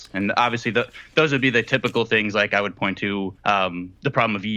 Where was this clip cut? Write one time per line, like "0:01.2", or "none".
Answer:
0:03.4